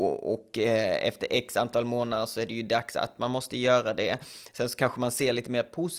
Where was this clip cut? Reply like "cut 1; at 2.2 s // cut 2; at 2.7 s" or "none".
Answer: none